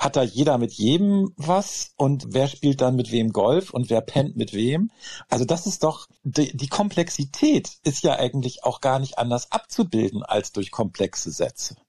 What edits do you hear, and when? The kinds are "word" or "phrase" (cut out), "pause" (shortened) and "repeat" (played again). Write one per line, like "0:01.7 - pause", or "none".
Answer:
0:02.2 - word
0:06.2 - pause